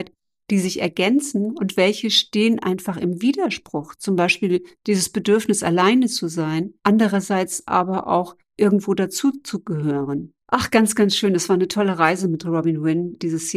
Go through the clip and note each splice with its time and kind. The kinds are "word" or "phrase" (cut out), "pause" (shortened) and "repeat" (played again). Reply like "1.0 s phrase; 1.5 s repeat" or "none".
6.8 s pause; 10.4 s pause